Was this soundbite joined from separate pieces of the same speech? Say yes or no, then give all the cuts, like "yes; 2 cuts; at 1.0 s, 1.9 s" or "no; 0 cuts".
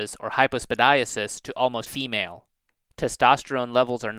yes; 1 cut; at 1.9 s